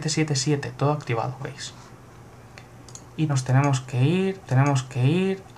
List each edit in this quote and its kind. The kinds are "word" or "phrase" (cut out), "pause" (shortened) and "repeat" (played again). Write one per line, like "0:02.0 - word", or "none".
0:01.4 - word
0:03.3 - word
0:04.5 - repeat